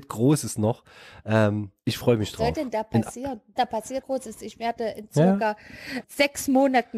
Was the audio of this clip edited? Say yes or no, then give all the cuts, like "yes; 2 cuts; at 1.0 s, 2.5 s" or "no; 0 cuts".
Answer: yes; 3 cuts; at 3.6 s, 4.0 s, 6.0 s